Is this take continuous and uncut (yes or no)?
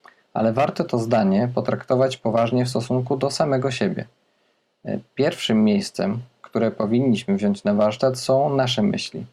yes